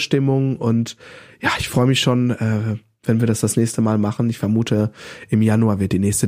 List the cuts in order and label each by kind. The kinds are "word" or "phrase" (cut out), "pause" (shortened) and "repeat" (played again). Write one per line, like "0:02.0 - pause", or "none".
none